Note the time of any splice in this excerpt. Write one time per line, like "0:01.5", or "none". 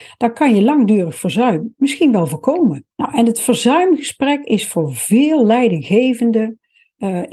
0:02.9